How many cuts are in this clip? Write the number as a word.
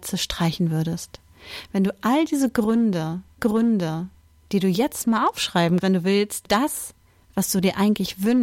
three